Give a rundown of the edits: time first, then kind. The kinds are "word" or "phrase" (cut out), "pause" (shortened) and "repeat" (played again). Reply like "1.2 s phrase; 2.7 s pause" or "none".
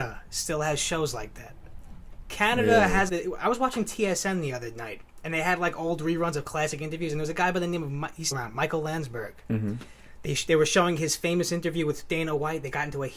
3.1 s word; 8.3 s word